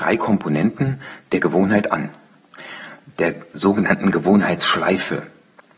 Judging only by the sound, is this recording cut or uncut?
uncut